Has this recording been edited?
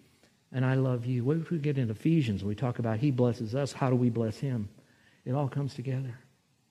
no; 0 cuts

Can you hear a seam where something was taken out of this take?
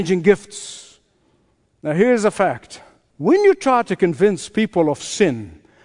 no; 0 cuts

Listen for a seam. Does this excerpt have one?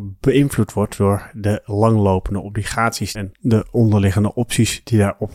yes; 1 cut; at 3.1 s

